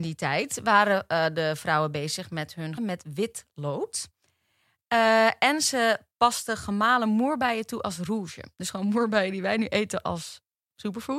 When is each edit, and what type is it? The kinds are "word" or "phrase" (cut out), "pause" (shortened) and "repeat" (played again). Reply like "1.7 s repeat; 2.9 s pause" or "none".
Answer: 2.8 s phrase